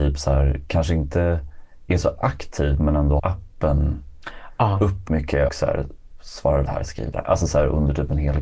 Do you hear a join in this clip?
yes; 5 cuts; at 3.2 s, 5.1 s, 5.5 s, 6.7 s, 7.1 s

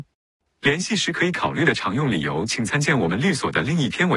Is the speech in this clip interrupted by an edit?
no; 0 cuts

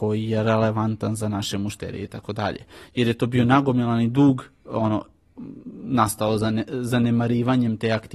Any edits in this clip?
no; 0 cuts

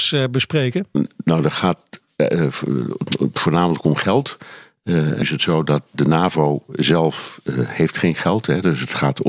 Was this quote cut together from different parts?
yes; 1 cut; at 5.2 s

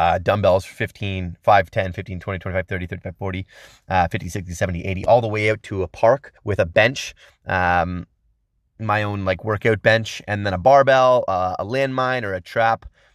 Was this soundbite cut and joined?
yes; 1 cut; at 6.4 s

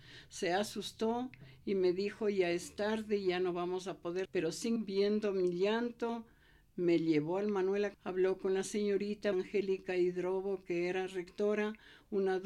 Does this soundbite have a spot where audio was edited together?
yes; 4 cuts; at 4.2 s, 4.8 s, 7.9 s, 9.3 s

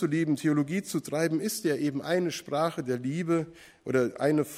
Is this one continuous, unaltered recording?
yes; 0 cuts

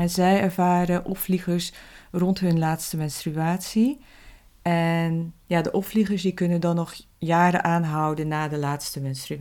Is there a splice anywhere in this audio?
no; 0 cuts

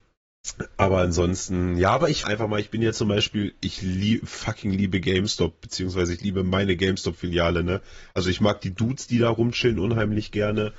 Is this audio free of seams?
no; 1 cut; at 2.2 s

